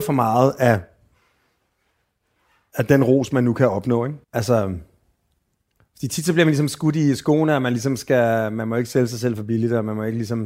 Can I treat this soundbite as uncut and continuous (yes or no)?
no